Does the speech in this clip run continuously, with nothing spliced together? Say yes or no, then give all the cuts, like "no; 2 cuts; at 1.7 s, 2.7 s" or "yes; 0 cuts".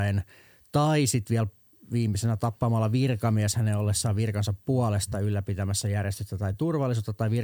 yes; 0 cuts